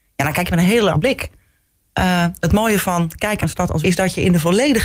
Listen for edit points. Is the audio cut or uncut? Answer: cut